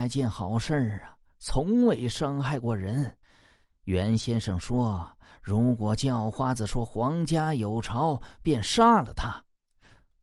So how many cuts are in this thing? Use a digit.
1